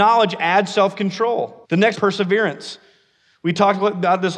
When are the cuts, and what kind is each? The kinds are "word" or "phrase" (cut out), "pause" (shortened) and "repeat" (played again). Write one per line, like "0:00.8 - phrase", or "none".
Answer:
0:01.6 - pause
0:01.9 - phrase